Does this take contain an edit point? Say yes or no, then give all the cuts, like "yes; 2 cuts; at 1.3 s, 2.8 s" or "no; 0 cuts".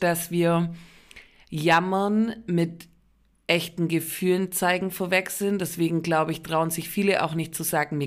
no; 0 cuts